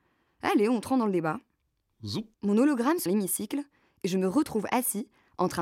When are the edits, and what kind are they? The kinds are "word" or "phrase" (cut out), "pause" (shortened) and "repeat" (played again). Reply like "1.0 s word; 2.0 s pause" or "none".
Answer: 2.3 s pause; 3.1 s phrase